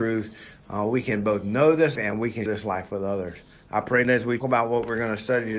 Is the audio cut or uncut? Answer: cut